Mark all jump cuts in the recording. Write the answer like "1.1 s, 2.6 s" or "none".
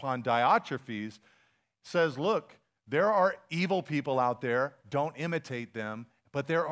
none